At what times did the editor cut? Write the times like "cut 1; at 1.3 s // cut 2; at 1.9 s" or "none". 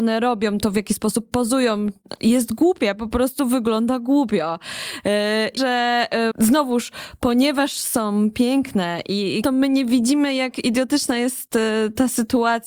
cut 1; at 5.6 s // cut 2; at 6.3 s // cut 3; at 9.4 s